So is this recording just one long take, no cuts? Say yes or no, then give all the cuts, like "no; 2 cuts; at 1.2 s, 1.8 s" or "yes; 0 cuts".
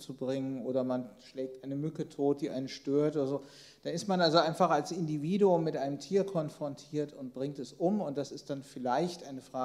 yes; 0 cuts